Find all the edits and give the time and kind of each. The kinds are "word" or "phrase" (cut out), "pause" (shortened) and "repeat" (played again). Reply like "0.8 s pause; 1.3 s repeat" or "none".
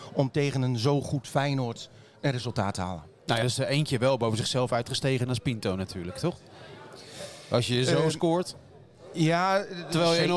3.4 s word